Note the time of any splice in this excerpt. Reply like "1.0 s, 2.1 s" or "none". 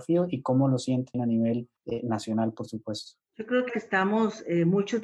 1.1 s, 1.8 s, 3.3 s, 3.7 s

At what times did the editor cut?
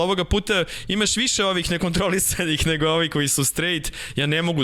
none

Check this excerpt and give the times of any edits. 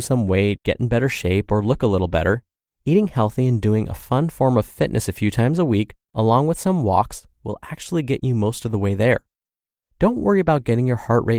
none

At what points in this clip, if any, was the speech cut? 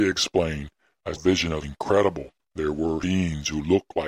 1.1 s, 1.6 s, 3.0 s

